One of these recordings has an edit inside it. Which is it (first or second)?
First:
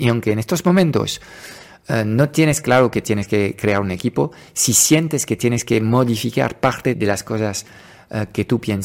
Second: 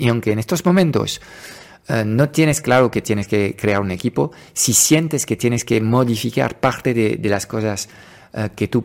first